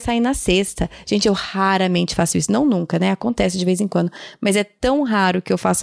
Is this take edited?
no; 0 cuts

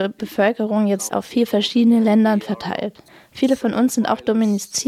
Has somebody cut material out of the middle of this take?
yes; 2 cuts; at 1.1 s, 3.1 s

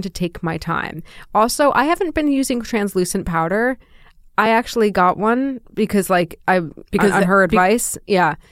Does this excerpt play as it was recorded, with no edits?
yes; 0 cuts

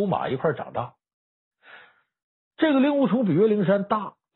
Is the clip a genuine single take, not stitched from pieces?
yes; 0 cuts

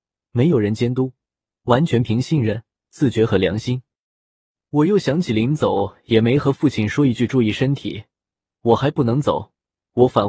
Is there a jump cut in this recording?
no; 0 cuts

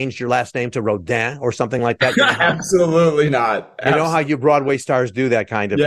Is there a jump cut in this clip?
no; 0 cuts

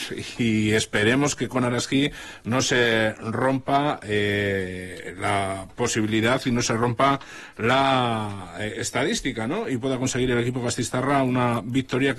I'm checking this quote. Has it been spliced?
no; 0 cuts

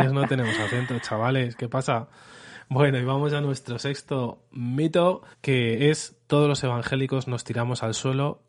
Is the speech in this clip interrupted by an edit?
yes; 1 cut; at 5.3 s

